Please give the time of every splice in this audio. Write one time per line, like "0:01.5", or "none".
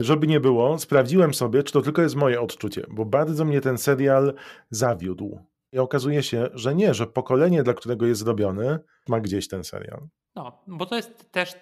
0:09.1